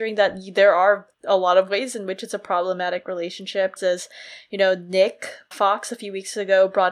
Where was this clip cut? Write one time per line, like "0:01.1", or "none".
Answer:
0:01.1
0:03.8
0:05.5